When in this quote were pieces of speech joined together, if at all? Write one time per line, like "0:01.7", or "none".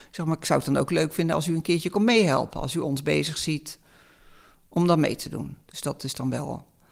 none

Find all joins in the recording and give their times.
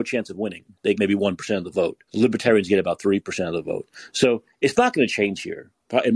0:01.0
0:02.1

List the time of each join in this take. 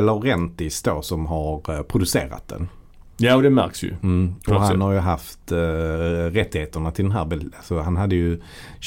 none

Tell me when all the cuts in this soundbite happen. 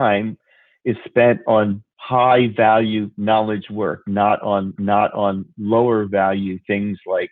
0:01.9
0:04.8

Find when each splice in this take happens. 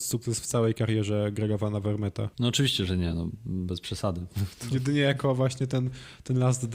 0:02.3

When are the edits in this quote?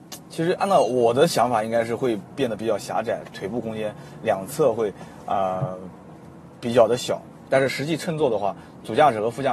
none

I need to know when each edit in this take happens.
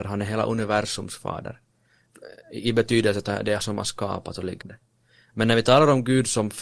0:03.6
0:04.6

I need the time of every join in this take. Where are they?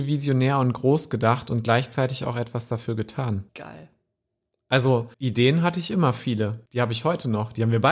0:03.5
0:05.1
0:06.7

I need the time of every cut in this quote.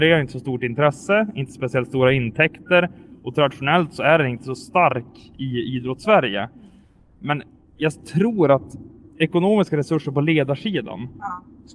none

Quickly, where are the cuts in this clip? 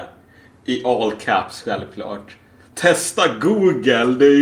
none

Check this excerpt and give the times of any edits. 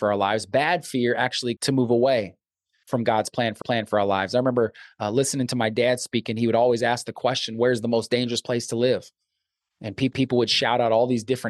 0:01.6
0:03.6
0:10.1

